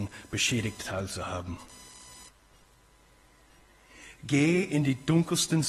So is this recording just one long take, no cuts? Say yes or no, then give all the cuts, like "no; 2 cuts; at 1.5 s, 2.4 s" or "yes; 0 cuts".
yes; 0 cuts